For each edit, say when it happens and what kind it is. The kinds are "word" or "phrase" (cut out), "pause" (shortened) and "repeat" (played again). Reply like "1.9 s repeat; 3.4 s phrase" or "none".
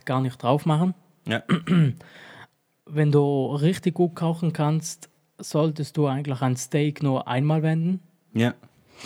none